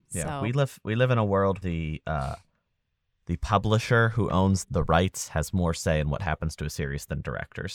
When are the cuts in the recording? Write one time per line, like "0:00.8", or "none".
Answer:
0:01.6
0:04.6

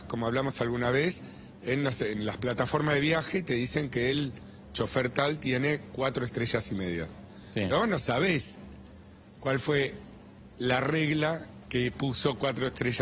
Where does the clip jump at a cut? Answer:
none

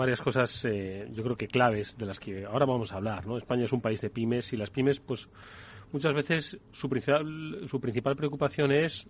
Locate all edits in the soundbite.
none

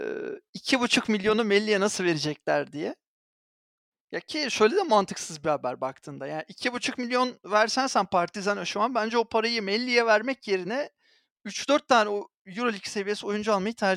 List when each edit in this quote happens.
none

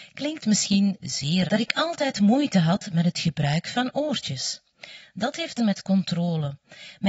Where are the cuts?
0:01.5
0:05.6

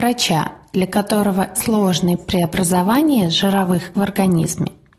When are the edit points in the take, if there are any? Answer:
0:01.5
0:02.2
0:03.9

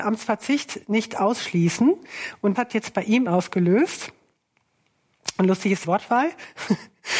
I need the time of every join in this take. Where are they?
0:02.6
0:03.3
0:05.8

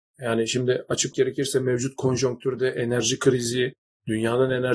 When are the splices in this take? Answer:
0:01.1

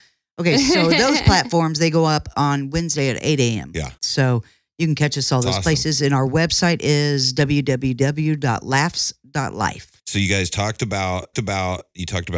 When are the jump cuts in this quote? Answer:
0:04.0
0:10.0
0:11.3

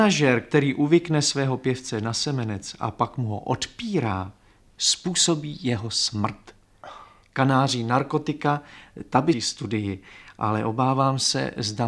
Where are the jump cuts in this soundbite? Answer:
0:09.3

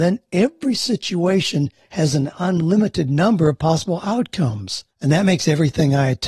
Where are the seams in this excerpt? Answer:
0:04.9

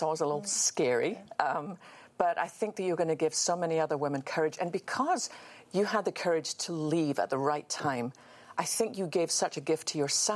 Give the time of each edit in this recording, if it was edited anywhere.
0:05.7

